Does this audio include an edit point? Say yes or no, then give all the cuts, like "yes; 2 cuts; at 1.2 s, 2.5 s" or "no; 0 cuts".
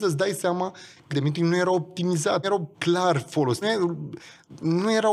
yes; 4 cuts; at 1.1 s, 2.4 s, 2.7 s, 3.6 s